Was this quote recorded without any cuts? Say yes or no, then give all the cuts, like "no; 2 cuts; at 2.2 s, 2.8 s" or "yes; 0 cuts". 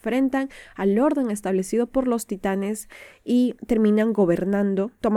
no; 1 cut; at 3.6 s